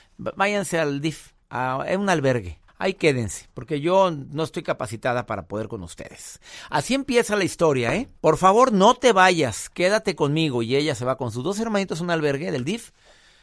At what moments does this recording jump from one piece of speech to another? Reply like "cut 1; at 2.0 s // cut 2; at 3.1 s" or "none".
cut 1; at 1.4 s // cut 2; at 2.7 s // cut 3; at 8.2 s